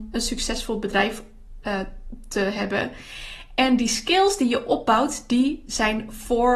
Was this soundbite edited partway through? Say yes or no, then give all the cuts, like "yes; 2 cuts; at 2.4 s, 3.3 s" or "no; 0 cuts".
no; 0 cuts